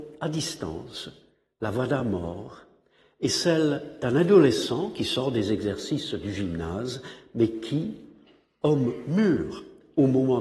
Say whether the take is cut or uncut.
uncut